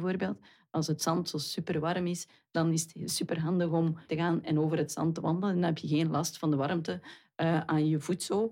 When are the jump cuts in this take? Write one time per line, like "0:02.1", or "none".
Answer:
0:04.1